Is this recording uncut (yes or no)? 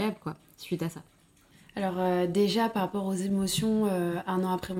yes